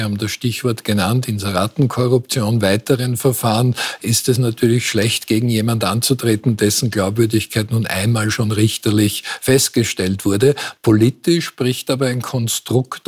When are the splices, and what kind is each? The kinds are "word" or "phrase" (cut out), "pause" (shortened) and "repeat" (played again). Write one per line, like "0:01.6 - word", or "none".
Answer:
none